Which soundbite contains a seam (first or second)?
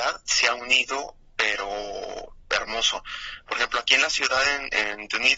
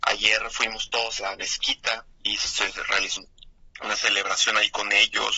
second